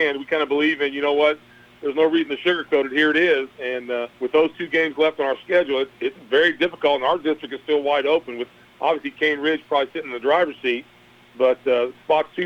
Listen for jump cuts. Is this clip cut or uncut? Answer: cut